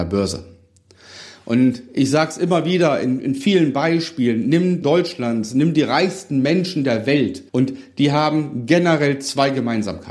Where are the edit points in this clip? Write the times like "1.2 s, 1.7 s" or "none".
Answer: 4.8 s, 7.5 s